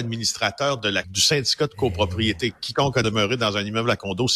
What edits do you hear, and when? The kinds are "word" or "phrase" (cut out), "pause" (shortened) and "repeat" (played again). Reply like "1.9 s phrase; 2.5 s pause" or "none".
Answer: 1.0 s word; 3.0 s word